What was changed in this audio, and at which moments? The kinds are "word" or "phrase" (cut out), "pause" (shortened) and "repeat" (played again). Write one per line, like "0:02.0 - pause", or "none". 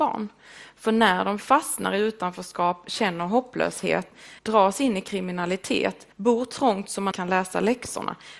0:04.4 - pause
0:06.1 - pause
0:07.1 - word